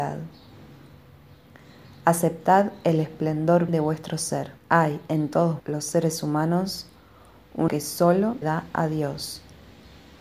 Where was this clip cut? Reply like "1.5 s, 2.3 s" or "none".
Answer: 3.7 s, 4.6 s, 5.6 s, 7.7 s, 8.4 s